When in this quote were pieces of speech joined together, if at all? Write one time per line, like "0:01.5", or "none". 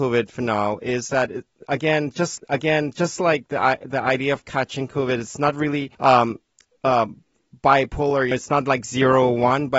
0:02.4
0:05.9
0:08.3